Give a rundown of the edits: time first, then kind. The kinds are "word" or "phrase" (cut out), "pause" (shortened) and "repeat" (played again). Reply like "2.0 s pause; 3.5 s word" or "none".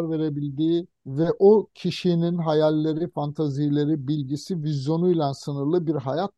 1.0 s pause